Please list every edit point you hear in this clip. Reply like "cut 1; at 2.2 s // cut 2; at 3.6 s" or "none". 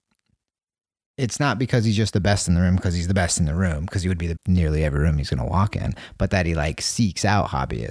cut 1; at 4.4 s